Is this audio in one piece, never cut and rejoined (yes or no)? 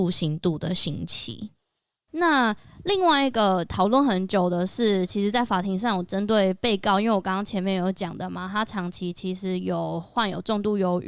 yes